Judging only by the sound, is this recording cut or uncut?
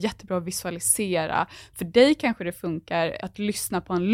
uncut